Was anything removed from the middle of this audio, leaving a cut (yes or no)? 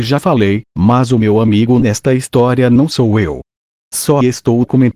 no